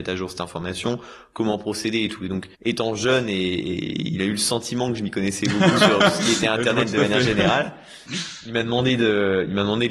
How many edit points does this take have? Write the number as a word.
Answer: one